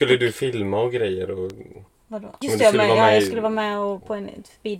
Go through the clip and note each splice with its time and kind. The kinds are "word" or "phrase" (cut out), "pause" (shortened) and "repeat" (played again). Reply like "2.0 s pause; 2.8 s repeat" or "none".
1.9 s pause; 2.4 s word